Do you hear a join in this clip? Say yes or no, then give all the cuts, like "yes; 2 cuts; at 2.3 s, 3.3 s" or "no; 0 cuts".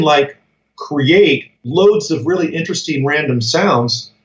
yes; 1 cut; at 1.6 s